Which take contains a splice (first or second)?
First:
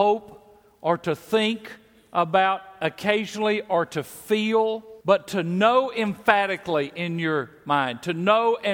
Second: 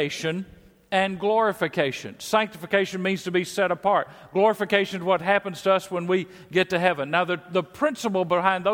first